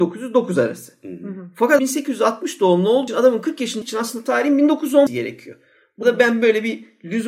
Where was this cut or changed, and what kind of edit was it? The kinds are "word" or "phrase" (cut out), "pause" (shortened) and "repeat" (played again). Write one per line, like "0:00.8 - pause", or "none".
0:01.8 - word
0:03.1 - word
0:03.8 - word
0:05.1 - word
0:06.0 - word